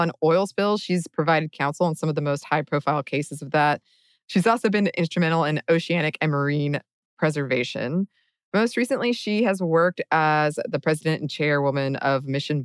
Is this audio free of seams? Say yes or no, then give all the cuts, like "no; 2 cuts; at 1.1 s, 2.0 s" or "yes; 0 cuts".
yes; 0 cuts